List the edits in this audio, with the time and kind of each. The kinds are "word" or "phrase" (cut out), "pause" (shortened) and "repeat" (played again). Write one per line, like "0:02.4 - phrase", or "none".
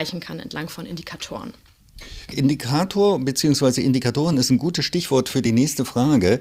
none